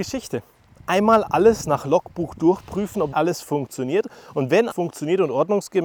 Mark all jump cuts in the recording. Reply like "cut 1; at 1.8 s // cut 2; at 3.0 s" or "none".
cut 1; at 3.1 s // cut 2; at 4.7 s